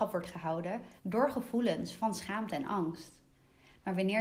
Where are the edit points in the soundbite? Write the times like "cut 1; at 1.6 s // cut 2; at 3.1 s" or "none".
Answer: cut 1; at 1.0 s